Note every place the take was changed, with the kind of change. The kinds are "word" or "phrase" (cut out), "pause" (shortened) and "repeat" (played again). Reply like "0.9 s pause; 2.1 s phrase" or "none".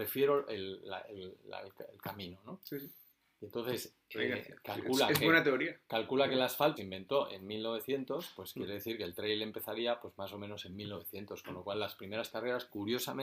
6.8 s word